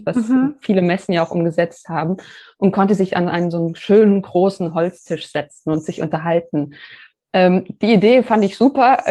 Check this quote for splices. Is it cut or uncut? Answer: uncut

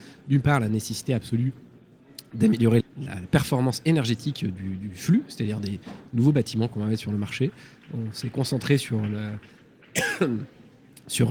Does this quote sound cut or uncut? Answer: cut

